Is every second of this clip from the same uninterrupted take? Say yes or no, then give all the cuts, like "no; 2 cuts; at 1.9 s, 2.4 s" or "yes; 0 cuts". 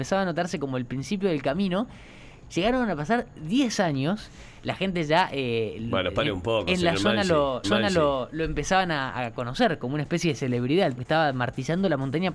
no; 2 cuts; at 7.6 s, 11.0 s